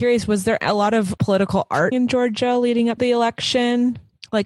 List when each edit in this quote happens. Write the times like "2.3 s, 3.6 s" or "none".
1.2 s, 1.9 s, 3.0 s